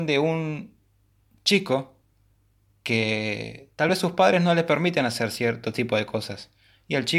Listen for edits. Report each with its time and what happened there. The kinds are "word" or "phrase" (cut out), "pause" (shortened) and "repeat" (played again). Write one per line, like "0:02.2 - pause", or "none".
none